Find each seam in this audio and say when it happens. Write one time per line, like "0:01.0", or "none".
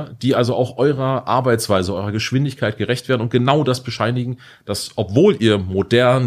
none